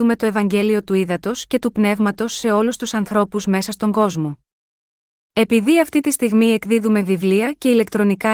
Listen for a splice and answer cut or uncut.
uncut